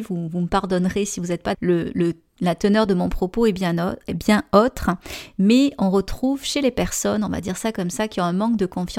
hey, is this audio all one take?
no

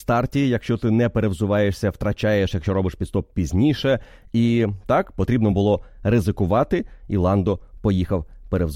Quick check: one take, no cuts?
yes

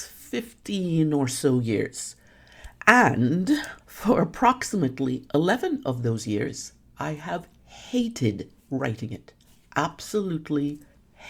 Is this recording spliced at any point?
yes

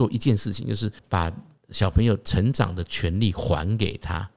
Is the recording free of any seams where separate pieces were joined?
no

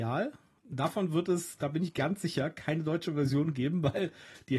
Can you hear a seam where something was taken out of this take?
no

